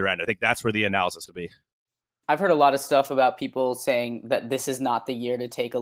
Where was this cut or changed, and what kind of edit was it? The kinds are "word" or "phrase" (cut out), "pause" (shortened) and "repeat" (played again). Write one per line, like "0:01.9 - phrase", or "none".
0:01.3 - word